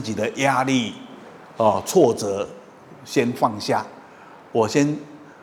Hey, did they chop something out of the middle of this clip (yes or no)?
no